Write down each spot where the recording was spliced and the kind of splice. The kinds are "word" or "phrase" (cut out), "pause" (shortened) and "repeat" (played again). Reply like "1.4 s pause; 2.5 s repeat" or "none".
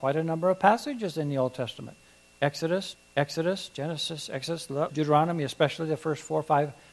2.9 s repeat; 4.9 s word